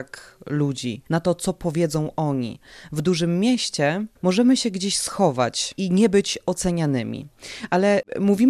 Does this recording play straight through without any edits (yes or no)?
no